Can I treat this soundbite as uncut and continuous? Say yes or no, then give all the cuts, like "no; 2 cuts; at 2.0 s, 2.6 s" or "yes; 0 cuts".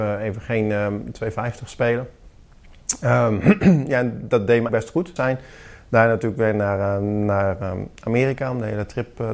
no; 2 cuts; at 4.7 s, 5.2 s